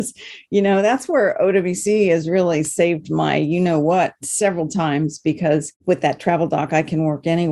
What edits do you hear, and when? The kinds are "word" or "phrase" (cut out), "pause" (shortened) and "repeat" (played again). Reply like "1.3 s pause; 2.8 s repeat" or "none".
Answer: 5.8 s pause